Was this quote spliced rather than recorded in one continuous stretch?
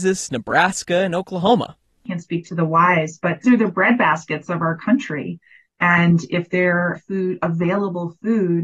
yes; 2 cuts; at 3.4 s, 6.9 s

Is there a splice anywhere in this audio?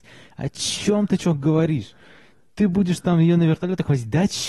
no; 0 cuts

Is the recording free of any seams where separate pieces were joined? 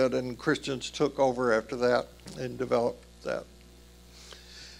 yes; 0 cuts

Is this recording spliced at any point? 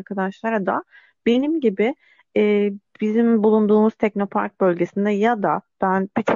no; 0 cuts

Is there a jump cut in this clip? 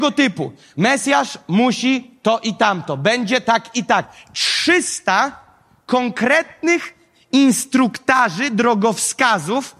no; 0 cuts

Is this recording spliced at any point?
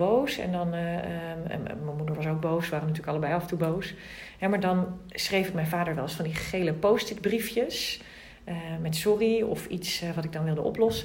no; 0 cuts

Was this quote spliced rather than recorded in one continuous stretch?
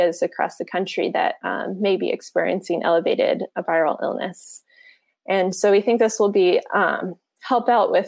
no; 0 cuts

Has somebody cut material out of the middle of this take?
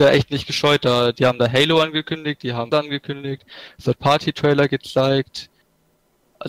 yes; 1 cut; at 2.7 s

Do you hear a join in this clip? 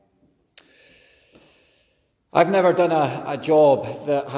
no; 0 cuts

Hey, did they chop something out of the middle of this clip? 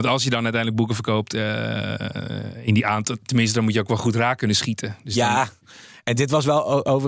no; 0 cuts

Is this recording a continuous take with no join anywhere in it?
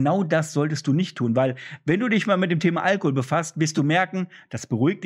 yes; 0 cuts

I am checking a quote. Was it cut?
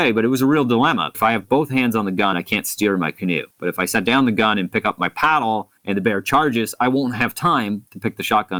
yes; 4 cuts; at 1.1 s, 2.3 s, 3.5 s, 5.8 s

